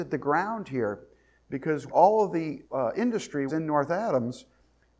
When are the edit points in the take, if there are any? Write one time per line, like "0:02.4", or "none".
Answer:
0:01.9
0:02.6
0:03.5

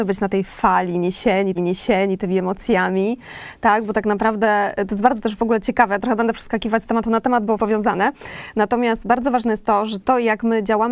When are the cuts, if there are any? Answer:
0:01.6
0:07.6

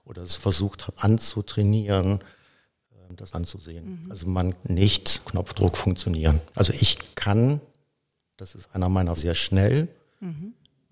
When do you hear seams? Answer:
0:01.0
0:03.3
0:04.6
0:05.2
0:06.5
0:07.1
0:09.2

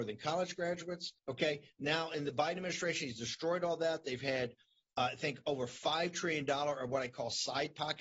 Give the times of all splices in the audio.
0:01.2

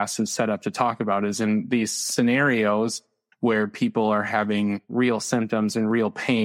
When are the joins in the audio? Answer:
none

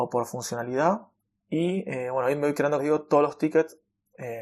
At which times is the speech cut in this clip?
0:01.2
0:02.8

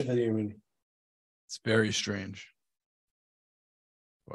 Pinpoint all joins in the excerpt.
none

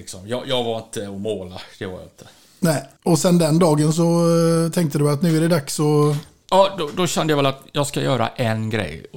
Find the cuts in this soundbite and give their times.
0:01.7

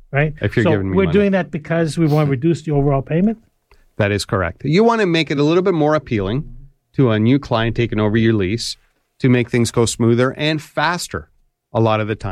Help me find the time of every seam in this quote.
none

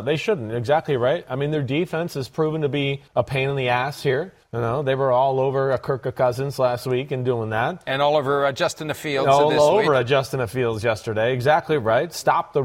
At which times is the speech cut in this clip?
0:03.1
0:04.4

